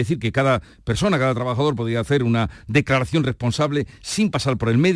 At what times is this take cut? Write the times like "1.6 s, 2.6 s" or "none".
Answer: none